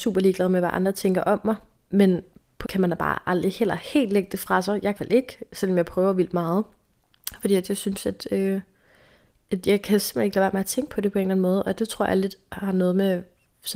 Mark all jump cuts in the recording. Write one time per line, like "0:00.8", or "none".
0:02.6
0:05.0